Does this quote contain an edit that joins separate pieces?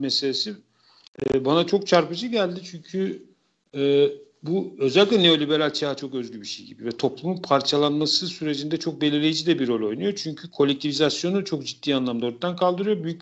no; 0 cuts

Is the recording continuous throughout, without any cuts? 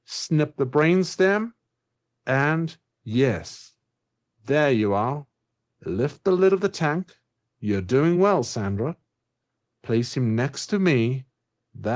yes; 0 cuts

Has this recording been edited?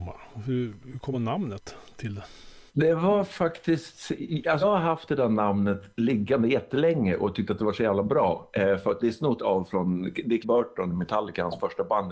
yes; 7 cuts; at 1.1 s, 2.7 s, 4.6 s, 5.9 s, 9.0 s, 9.4 s, 10.4 s

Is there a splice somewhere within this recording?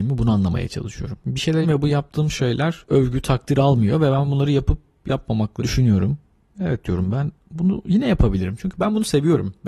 yes; 2 cuts; at 1.6 s, 5.6 s

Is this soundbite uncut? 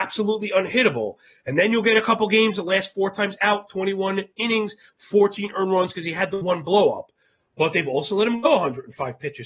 yes; 0 cuts

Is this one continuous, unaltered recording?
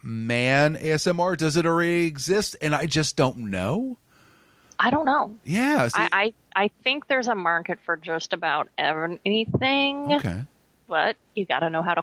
yes; 0 cuts

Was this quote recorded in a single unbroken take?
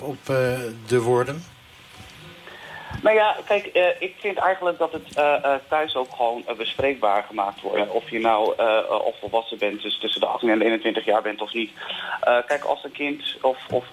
no; 1 cut; at 7.6 s

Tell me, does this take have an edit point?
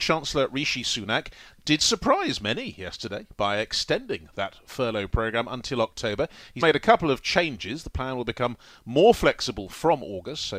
yes; 1 cut; at 6.6 s

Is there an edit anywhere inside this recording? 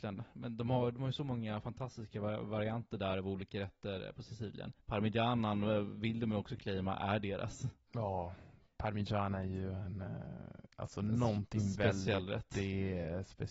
yes; 1 cut; at 4.8 s

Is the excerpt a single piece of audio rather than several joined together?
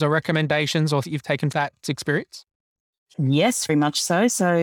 no; 3 cuts; at 1.0 s, 1.5 s, 3.7 s

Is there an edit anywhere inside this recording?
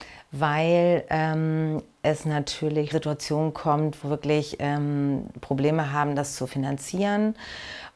yes; 2 cuts; at 2.9 s, 4.0 s

